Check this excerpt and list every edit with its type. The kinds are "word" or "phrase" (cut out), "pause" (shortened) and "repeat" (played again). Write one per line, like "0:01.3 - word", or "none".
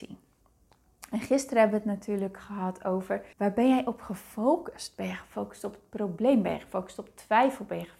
0:03.3 - pause

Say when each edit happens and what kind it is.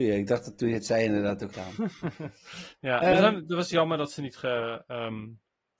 0:01.5 - word

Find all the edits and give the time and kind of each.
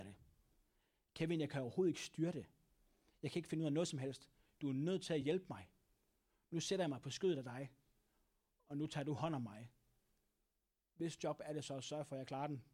none

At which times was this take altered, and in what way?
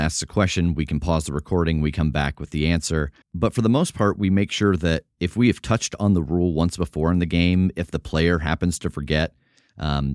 0:03.2 - pause

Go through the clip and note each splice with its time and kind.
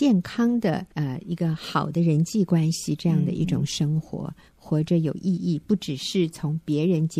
0:00.9 - pause
0:04.5 - pause

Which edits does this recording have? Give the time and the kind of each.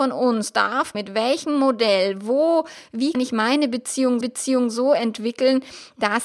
0:00.9 - word
0:03.1 - word
0:04.2 - repeat

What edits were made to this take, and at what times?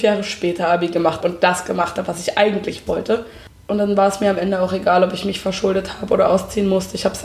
0:01.2 - word

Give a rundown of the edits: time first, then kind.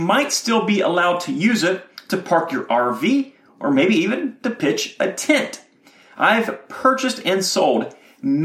none

